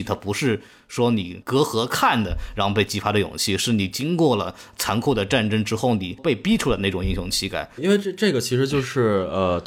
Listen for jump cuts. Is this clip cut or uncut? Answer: cut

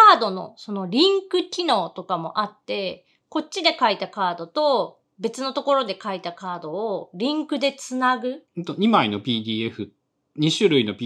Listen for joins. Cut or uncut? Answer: cut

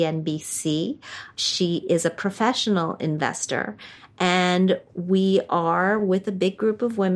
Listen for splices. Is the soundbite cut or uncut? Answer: uncut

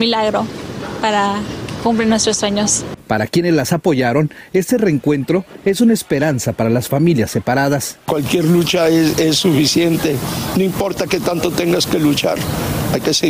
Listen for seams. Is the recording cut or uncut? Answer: uncut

